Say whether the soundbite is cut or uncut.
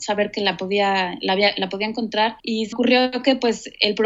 cut